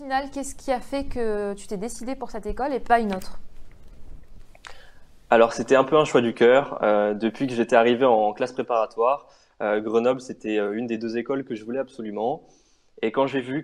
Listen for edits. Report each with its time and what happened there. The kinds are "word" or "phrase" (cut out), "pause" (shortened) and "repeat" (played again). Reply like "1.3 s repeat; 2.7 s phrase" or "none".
none